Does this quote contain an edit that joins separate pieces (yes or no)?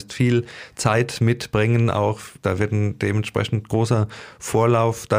no